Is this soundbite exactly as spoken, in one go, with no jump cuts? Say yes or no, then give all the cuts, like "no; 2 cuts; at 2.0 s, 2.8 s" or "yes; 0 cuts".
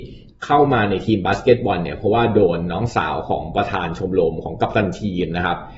yes; 0 cuts